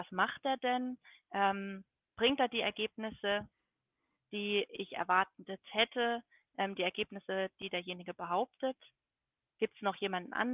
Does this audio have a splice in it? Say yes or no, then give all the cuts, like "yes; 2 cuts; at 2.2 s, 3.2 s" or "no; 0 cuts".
no; 0 cuts